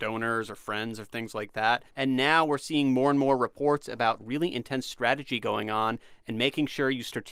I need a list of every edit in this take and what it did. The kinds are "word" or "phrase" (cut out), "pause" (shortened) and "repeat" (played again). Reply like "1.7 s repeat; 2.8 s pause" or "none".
1.9 s pause